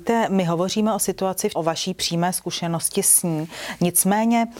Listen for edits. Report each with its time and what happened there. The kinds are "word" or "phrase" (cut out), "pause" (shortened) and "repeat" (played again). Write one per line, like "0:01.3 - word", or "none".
0:01.5 - phrase